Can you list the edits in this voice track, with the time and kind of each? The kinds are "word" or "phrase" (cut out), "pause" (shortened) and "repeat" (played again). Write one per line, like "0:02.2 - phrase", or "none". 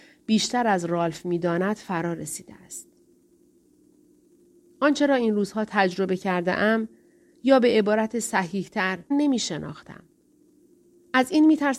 0:09.1 - phrase